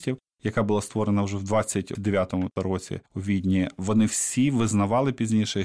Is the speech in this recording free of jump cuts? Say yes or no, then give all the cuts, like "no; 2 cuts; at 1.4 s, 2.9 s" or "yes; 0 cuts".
no; 1 cut; at 3.1 s